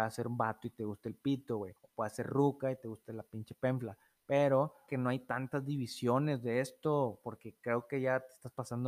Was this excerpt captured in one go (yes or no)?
no